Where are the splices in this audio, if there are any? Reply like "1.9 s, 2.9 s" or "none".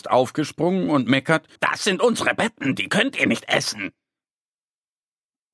1.5 s